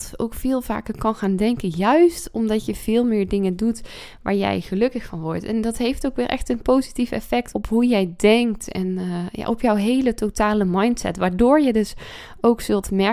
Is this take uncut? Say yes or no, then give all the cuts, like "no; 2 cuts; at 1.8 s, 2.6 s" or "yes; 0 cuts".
no; 1 cut; at 7.5 s